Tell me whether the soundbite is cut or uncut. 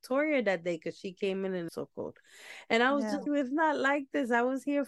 cut